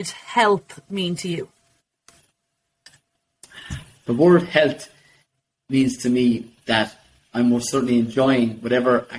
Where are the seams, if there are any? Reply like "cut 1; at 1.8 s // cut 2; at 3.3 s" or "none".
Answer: none